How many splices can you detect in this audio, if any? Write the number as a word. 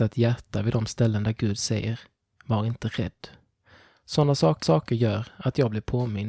one